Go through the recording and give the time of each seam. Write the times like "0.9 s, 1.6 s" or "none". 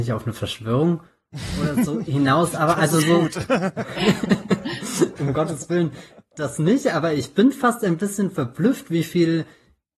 5.1 s